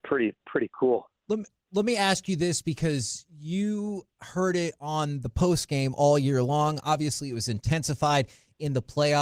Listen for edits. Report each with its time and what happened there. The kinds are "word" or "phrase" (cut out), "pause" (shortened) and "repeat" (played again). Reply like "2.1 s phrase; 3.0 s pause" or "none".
none